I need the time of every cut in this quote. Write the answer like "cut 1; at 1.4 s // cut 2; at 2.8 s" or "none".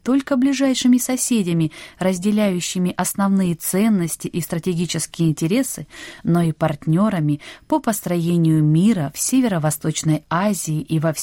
none